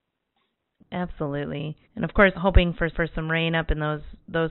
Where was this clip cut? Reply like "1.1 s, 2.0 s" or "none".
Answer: 1.8 s, 2.3 s, 2.9 s